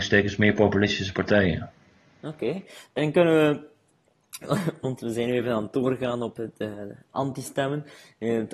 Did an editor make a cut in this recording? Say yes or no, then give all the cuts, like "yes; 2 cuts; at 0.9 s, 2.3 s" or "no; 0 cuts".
no; 0 cuts